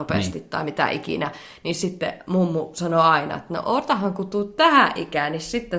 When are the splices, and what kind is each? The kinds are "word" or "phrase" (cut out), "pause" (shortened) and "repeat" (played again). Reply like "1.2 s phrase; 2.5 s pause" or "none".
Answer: none